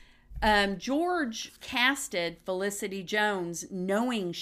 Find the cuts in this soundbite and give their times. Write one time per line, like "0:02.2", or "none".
0:01.6